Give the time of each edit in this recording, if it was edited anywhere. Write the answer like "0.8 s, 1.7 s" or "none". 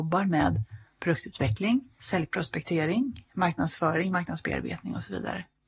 none